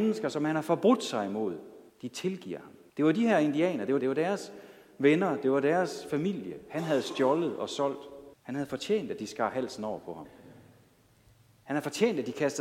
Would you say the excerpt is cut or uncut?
cut